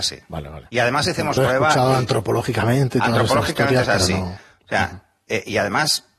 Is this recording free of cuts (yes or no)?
no